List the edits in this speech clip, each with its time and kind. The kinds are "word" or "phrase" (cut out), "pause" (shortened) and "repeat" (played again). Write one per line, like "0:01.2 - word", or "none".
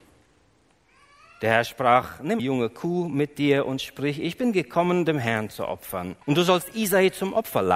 0:02.4 - word
0:06.2 - pause